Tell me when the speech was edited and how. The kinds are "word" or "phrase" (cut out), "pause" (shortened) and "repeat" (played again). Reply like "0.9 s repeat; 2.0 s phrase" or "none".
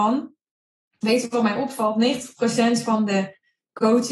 none